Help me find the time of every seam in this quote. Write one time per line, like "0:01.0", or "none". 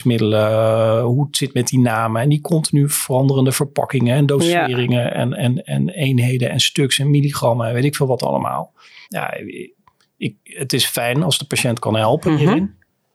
0:09.0
0:10.4